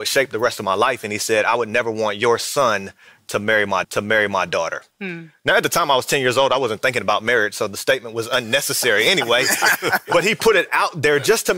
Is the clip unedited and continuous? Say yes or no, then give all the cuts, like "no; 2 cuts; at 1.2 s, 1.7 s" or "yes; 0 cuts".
no; 1 cut; at 3.8 s